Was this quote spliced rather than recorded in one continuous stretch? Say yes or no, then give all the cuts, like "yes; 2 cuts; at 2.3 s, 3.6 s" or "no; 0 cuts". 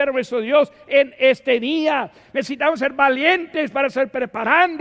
no; 0 cuts